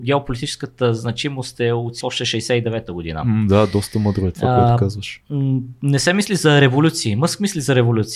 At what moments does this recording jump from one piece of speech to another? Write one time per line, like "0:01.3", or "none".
0:02.0

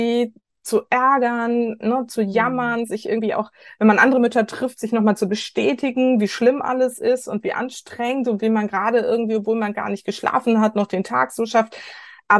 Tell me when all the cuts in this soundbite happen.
none

